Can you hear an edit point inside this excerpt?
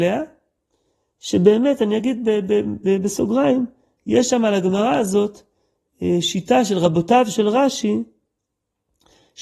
no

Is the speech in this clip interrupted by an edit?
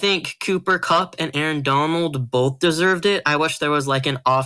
no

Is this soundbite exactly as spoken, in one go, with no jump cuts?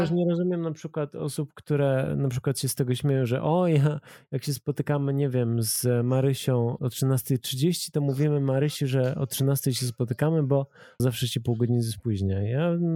no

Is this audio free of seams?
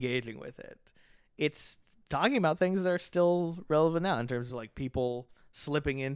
yes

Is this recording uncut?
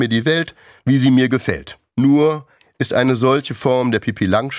no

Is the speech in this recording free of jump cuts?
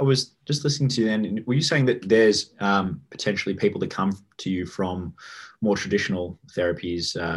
yes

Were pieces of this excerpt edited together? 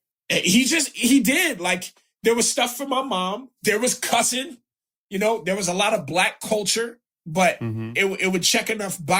no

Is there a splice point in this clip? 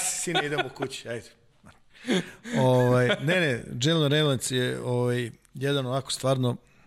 no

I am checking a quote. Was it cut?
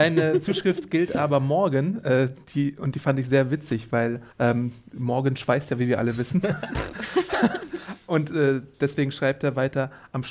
yes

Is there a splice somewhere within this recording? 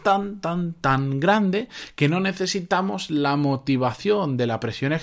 no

